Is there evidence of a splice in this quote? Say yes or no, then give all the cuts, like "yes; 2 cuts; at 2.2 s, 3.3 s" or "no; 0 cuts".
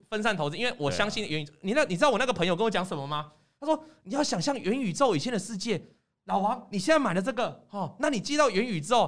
no; 0 cuts